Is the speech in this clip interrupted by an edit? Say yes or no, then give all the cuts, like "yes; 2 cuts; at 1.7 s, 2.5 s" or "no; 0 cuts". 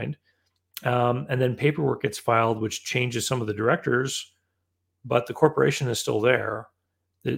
no; 0 cuts